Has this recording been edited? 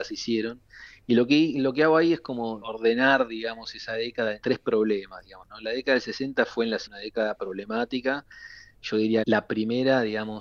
yes; 4 cuts; at 2.6 s, 4.4 s, 6.9 s, 9.2 s

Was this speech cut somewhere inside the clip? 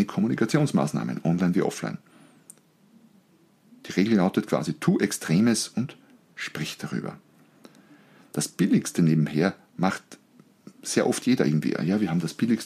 no; 0 cuts

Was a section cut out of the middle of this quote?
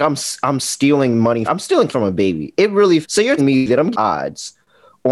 yes; 5 cuts; at 1.5 s, 1.9 s, 3.0 s, 3.4 s, 3.9 s

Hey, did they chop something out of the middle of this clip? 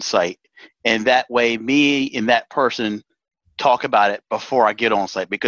no; 0 cuts

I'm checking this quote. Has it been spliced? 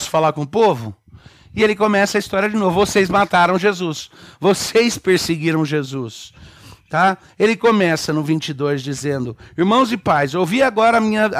no; 0 cuts

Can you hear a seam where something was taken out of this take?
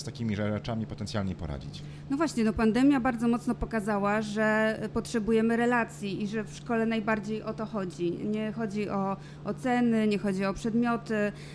no; 0 cuts

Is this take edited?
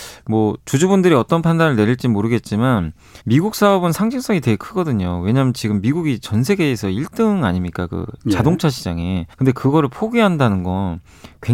yes; 2 cuts; at 3.2 s, 9.3 s

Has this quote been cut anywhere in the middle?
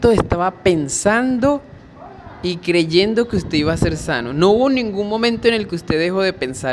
no; 0 cuts

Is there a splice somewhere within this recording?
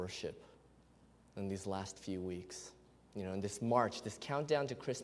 no; 0 cuts

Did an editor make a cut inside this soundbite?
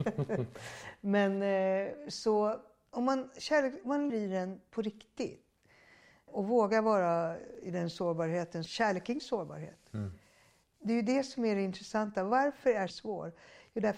yes; 4 cuts; at 4.1 s, 8.7 s, 9.2 s, 12.9 s

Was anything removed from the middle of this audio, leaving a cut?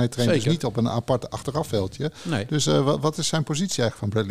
no; 0 cuts

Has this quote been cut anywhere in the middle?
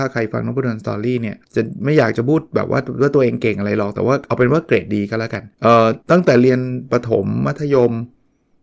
yes; 3 cuts; at 1.4 s, 5.5 s, 6.0 s

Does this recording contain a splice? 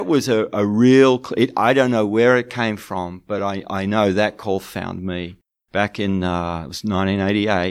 no; 0 cuts

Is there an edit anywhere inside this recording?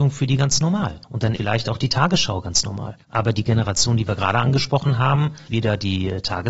yes; 4 cuts; at 1.0 s, 1.4 s, 3.0 s, 5.5 s

